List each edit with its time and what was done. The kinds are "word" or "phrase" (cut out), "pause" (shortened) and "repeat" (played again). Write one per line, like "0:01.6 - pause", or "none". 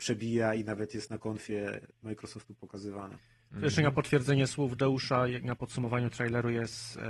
none